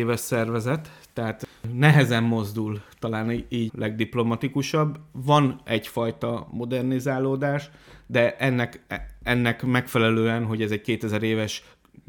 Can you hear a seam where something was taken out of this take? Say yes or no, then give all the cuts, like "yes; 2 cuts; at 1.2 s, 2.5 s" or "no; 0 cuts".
yes; 1 cut; at 3.7 s